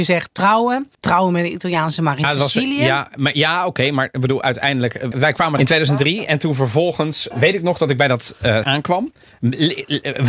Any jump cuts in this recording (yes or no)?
yes